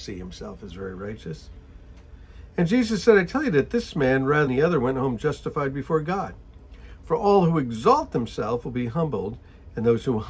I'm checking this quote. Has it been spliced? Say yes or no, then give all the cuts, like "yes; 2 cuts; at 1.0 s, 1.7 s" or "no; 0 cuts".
yes; 1 cut; at 4.5 s